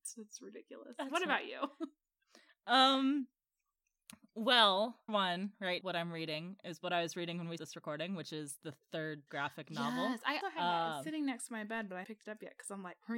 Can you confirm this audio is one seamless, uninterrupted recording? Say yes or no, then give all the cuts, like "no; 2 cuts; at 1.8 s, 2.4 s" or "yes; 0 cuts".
no; 6 cuts; at 5.1 s, 5.8 s, 7.6 s, 9.3 s, 10.4 s, 12.0 s